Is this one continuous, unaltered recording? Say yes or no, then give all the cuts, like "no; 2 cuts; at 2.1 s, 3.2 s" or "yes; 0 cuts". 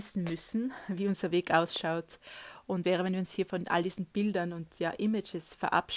no; 1 cut; at 2.8 s